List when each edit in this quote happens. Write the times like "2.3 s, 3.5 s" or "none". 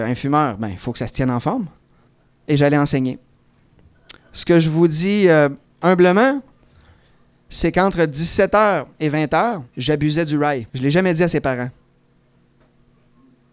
2.1 s, 5.6 s, 8.9 s, 9.7 s, 10.7 s